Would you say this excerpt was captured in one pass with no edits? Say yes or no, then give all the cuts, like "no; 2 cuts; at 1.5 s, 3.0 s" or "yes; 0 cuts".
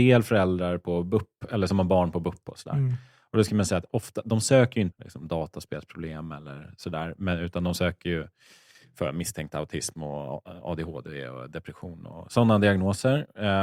no; 1 cut; at 4.9 s